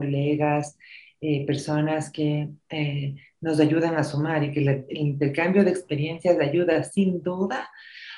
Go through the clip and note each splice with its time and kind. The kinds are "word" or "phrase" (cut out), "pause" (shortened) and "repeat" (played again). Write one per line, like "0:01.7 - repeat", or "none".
none